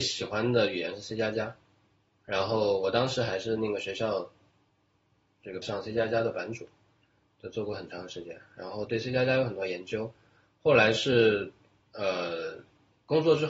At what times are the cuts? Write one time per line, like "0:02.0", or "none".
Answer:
0:05.6